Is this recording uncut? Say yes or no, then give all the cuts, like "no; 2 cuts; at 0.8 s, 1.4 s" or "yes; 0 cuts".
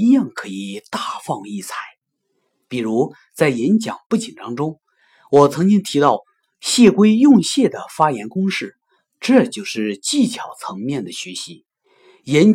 yes; 0 cuts